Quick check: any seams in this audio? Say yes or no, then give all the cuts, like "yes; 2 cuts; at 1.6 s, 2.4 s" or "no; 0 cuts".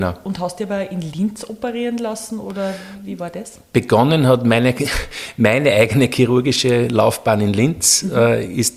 no; 0 cuts